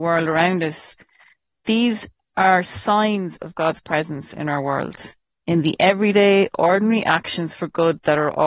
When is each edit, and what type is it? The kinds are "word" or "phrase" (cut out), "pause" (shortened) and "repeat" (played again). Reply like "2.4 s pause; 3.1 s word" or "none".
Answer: none